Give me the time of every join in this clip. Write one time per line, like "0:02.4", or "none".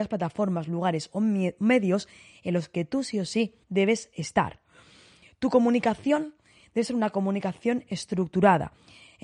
0:03.6